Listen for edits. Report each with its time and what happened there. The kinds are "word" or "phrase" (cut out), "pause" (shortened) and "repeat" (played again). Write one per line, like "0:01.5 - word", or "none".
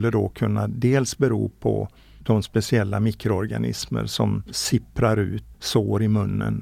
0:05.5 - word